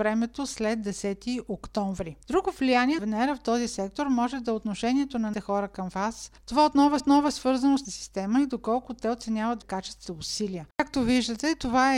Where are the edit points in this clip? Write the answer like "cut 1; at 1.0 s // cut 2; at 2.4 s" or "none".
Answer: cut 1; at 2.2 s // cut 2; at 3.0 s // cut 3; at 5.3 s // cut 4; at 6.4 s // cut 5; at 7.0 s // cut 6; at 7.8 s // cut 7; at 9.6 s // cut 8; at 10.1 s // cut 9; at 10.7 s